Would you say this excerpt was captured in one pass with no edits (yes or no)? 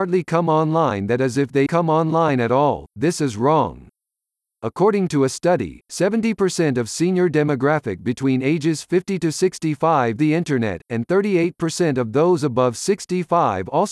no